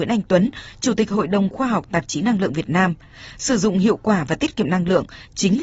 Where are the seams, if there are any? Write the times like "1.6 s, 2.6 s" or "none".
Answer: none